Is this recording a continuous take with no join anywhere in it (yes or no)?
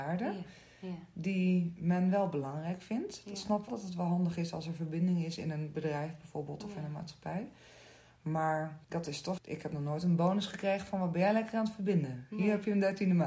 no